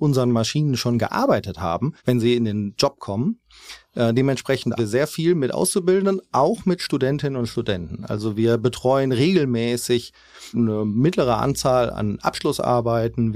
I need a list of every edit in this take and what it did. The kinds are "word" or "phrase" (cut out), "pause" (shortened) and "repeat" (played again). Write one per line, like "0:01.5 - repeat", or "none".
0:02.0 - pause
0:04.8 - word
0:10.5 - word

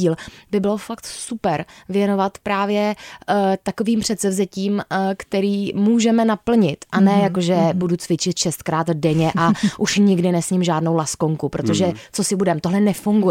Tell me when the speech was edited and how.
none

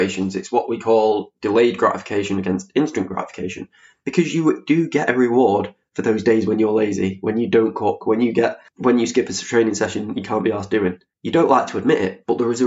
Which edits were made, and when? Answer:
none

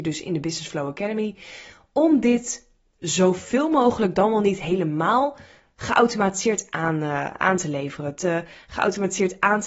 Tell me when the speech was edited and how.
none

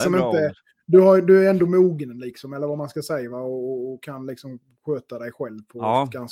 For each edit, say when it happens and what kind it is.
none

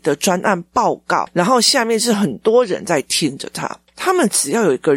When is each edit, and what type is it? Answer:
none

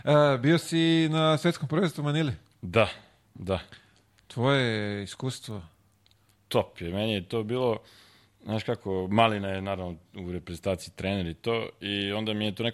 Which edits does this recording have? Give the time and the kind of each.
none

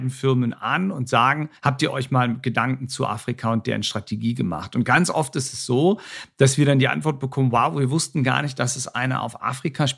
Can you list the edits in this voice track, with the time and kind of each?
0:01.6 - pause

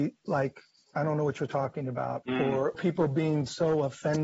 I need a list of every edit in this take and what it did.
0:02.2 - word
0:02.7 - word

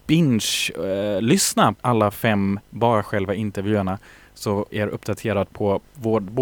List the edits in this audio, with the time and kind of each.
0:01.7 - word
0:02.7 - word
0:04.7 - word

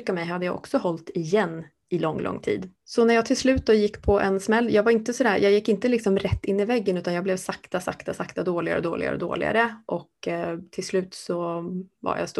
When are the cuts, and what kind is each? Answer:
0:02.8 - pause

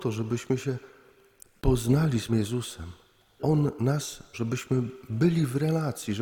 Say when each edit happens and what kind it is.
0:02.3 - word
0:03.4 - word
0:04.3 - word

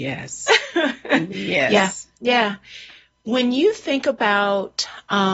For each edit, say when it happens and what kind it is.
none

